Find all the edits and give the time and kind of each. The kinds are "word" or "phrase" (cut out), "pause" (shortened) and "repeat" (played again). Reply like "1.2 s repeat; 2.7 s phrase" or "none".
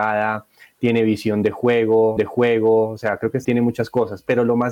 2.2 s repeat; 3.4 s word